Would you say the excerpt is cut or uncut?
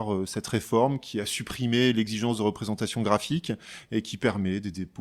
uncut